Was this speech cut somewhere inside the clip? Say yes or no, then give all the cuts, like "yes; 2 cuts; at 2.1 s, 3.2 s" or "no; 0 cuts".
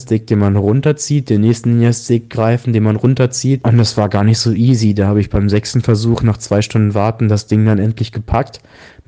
no; 0 cuts